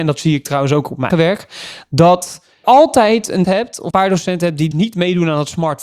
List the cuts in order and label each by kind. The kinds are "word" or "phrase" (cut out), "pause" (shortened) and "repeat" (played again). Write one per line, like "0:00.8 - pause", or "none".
0:01.1 - word
0:02.6 - word
0:03.4 - word
0:03.9 - word
0:04.7 - word